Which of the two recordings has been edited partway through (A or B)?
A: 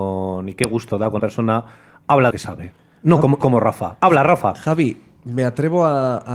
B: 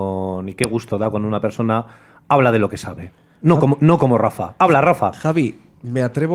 A